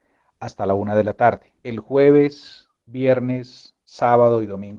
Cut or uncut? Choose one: cut